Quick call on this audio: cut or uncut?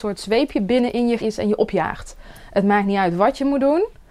cut